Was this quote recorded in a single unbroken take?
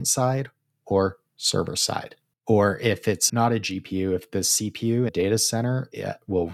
no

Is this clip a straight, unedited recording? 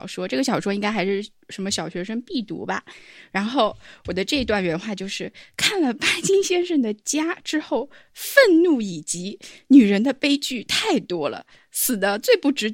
yes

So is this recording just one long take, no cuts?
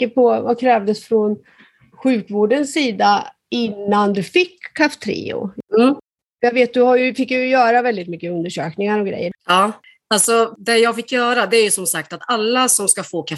yes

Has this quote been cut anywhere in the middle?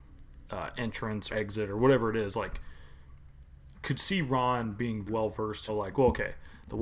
yes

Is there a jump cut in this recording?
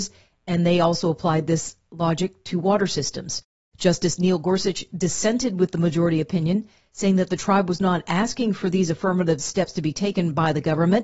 no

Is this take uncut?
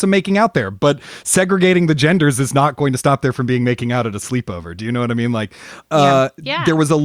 yes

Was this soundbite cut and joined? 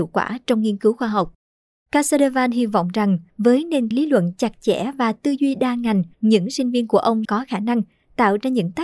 yes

